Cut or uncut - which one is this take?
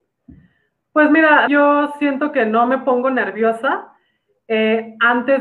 cut